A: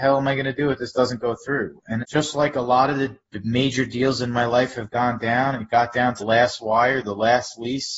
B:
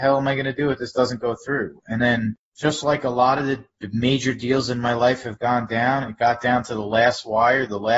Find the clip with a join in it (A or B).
A